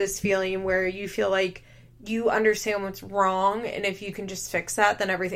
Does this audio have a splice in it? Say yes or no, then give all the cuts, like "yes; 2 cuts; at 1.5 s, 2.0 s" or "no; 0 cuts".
yes; 1 cut; at 4.1 s